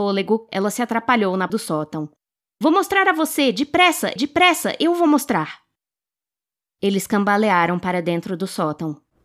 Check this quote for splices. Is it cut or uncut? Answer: cut